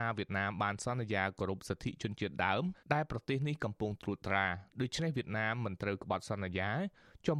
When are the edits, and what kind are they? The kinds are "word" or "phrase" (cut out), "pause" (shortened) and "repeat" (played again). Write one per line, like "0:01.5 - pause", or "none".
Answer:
0:02.8 - pause